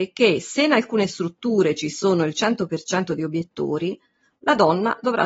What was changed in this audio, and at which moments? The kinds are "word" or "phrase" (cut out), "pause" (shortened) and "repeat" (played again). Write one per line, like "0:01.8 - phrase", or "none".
none